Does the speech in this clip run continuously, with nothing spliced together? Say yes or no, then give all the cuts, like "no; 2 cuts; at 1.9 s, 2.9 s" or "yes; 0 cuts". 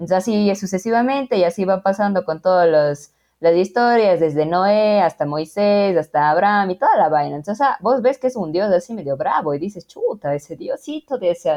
yes; 0 cuts